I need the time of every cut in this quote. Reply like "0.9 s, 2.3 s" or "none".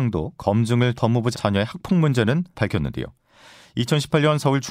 1.0 s, 1.3 s, 2.5 s